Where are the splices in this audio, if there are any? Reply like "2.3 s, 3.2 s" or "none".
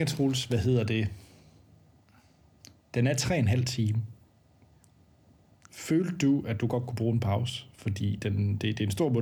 none